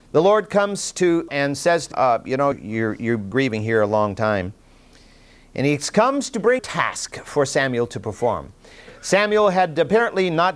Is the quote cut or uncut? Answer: cut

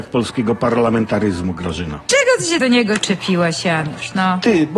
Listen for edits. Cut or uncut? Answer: cut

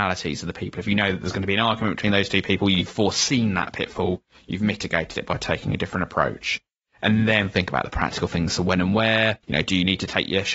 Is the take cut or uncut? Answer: cut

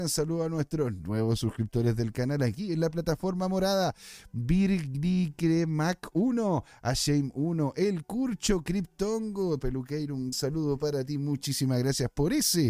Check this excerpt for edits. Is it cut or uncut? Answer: cut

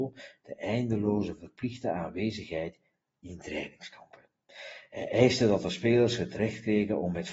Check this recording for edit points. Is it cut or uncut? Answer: uncut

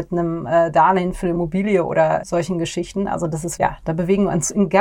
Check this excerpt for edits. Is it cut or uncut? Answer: cut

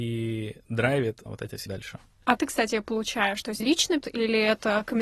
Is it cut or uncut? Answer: cut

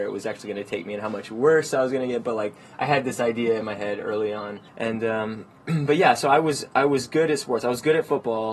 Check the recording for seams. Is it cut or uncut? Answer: cut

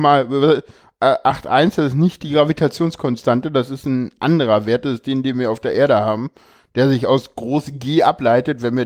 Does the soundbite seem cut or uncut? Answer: uncut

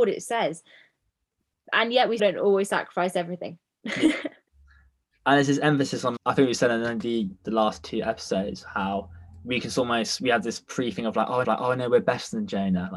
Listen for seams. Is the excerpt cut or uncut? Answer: cut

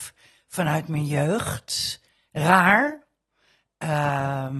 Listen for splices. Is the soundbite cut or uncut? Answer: uncut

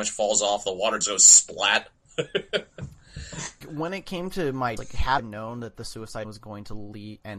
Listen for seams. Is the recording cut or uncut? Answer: cut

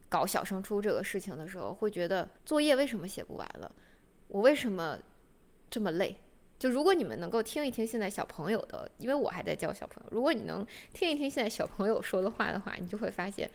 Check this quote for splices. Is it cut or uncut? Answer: cut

